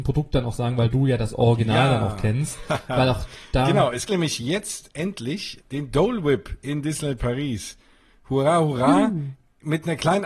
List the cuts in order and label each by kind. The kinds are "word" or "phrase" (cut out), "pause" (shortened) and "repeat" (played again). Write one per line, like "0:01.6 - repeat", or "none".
0:04.1 - word
0:05.6 - word